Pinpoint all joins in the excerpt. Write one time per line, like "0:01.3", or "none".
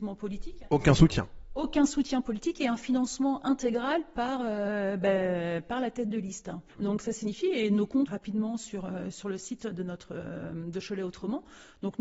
0:06.7
0:08.1